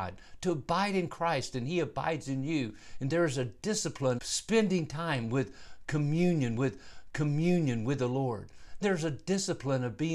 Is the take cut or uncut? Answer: cut